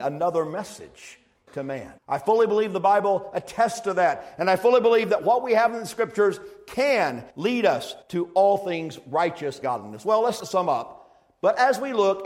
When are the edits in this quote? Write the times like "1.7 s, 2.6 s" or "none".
1.5 s, 2.0 s, 7.3 s, 8.0 s, 9.6 s, 10.4 s